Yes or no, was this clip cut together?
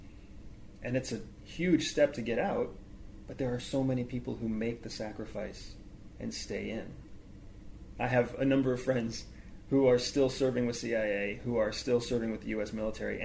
no